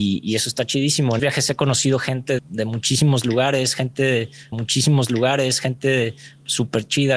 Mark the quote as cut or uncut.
cut